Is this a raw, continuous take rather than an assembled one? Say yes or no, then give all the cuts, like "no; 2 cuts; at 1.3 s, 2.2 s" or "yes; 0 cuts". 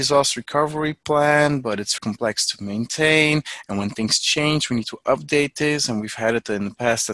no; 1 cut; at 2.0 s